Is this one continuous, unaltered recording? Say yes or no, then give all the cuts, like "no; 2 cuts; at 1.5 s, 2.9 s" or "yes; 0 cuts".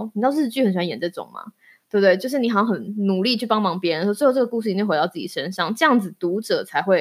yes; 0 cuts